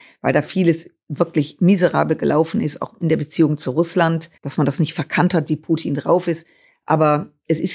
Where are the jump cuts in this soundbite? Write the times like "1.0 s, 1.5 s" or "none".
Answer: 4.4 s